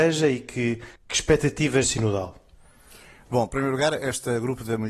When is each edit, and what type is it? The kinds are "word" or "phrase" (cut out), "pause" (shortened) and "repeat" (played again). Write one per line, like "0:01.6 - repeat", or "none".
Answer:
0:01.0 - pause
0:01.8 - phrase